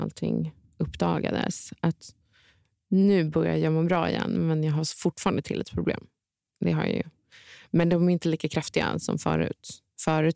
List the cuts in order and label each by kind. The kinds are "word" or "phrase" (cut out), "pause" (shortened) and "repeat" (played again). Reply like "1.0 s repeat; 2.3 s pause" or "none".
none